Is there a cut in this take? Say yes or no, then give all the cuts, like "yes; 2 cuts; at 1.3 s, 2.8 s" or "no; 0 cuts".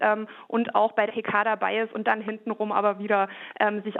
yes; 1 cut; at 1.1 s